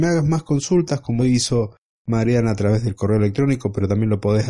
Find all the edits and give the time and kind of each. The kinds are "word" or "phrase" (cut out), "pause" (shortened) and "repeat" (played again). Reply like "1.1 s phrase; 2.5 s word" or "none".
1.2 s word